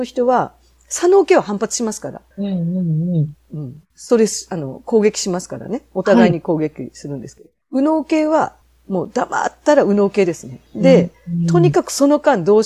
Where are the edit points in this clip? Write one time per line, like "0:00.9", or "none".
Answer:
0:02.3
0:03.9
0:07.6
0:08.6
0:10.7